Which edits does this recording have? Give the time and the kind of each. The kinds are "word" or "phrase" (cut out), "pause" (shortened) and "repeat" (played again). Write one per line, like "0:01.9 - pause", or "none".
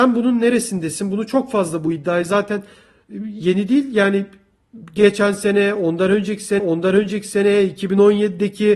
0:06.6 - repeat